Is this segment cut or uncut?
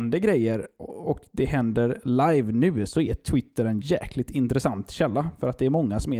uncut